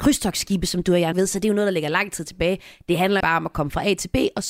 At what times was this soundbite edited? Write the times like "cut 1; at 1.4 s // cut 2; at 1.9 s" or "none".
cut 1; at 1.1 s // cut 2; at 3.2 s